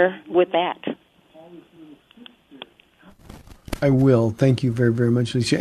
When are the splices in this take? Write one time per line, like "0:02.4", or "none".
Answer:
0:03.8